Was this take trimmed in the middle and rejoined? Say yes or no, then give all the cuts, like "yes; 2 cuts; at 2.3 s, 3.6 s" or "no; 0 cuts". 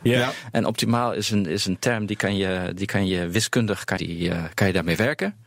yes; 1 cut; at 4.0 s